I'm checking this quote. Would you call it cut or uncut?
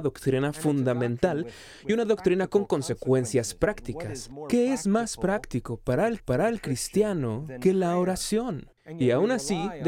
cut